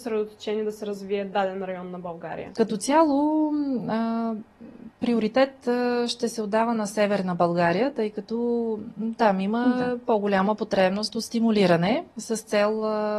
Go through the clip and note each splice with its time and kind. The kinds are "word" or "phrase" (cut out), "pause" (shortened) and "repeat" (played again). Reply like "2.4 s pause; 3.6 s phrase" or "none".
none